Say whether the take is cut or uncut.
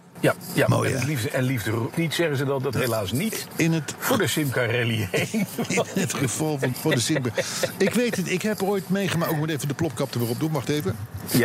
cut